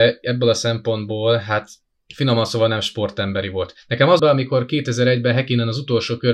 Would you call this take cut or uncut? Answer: cut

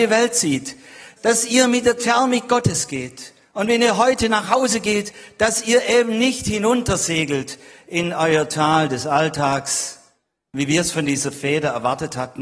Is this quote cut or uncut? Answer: cut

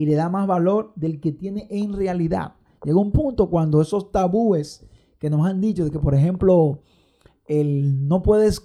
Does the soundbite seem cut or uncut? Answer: uncut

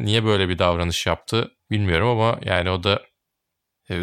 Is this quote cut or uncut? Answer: cut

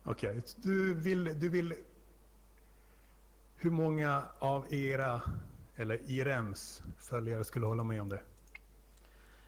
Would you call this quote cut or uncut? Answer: uncut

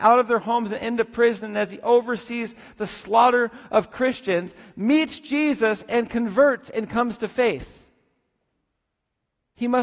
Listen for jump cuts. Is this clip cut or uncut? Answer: uncut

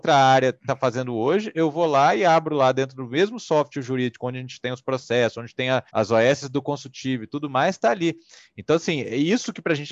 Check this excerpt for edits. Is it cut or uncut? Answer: cut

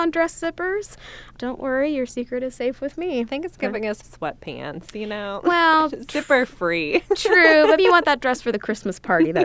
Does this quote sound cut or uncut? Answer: cut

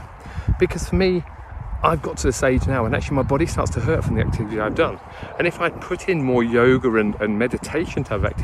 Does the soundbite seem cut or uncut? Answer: uncut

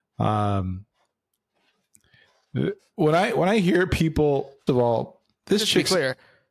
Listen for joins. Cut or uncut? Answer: cut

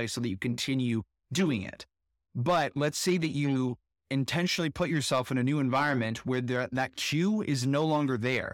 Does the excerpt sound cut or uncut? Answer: uncut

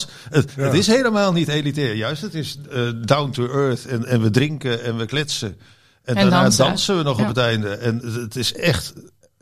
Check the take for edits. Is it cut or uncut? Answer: cut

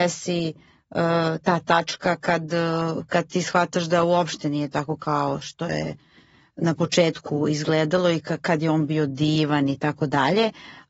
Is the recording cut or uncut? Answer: uncut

